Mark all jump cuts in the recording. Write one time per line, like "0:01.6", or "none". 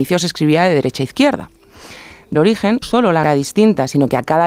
0:02.3
0:02.8
0:03.2